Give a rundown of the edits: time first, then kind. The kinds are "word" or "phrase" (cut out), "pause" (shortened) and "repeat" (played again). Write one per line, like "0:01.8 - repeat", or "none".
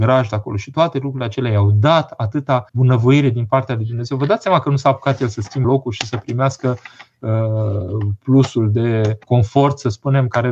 0:02.7 - pause
0:05.6 - word
0:09.2 - pause